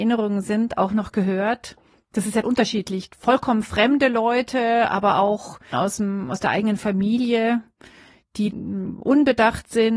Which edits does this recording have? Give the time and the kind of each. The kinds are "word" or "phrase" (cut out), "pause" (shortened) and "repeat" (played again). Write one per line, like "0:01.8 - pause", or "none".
0:02.4 - word
0:05.7 - word
0:08.5 - word